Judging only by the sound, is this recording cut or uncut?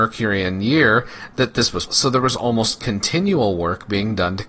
cut